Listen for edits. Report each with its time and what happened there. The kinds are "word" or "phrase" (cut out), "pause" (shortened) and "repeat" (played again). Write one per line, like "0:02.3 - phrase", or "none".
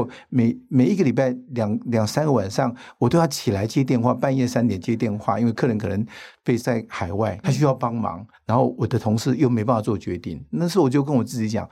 0:06.6 - word
0:07.4 - word